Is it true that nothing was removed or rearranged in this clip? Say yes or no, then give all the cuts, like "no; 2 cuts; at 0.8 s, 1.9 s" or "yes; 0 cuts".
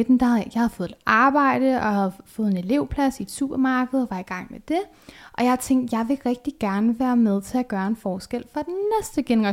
yes; 0 cuts